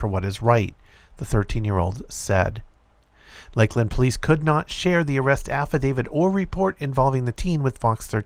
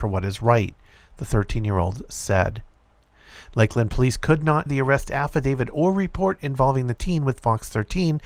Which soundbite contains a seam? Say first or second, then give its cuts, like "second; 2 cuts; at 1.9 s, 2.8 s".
second; 1 cut; at 4.7 s